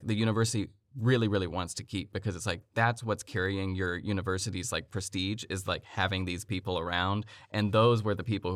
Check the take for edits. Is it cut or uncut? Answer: uncut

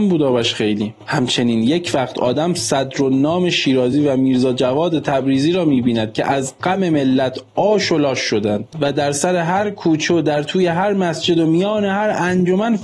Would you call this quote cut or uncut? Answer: uncut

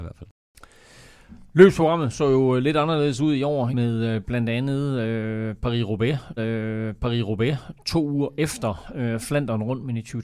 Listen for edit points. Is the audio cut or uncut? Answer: cut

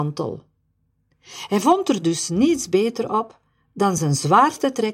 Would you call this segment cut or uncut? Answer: uncut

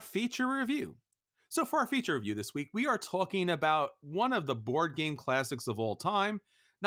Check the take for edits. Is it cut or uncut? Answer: uncut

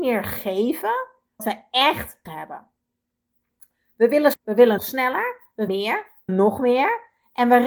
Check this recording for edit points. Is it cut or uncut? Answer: cut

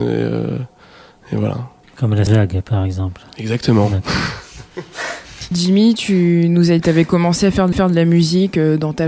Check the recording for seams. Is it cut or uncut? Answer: cut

